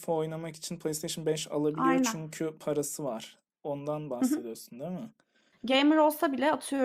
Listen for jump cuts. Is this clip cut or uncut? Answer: uncut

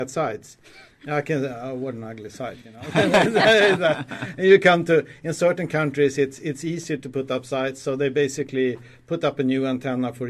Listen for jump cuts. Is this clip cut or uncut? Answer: uncut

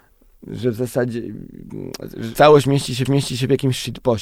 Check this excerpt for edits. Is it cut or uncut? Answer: cut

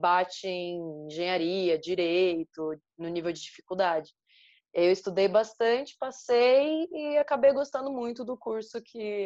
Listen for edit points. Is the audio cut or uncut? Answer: uncut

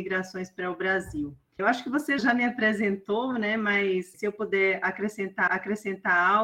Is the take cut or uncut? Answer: cut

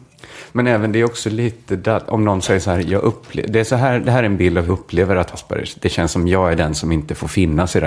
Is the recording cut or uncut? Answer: cut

